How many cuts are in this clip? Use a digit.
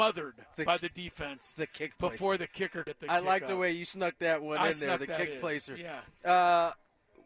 1